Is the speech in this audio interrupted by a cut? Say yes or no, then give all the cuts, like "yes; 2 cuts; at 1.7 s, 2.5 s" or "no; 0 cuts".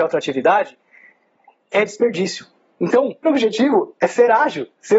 yes; 1 cut; at 3.2 s